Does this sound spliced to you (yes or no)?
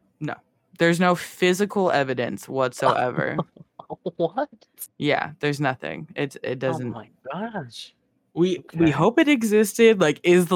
no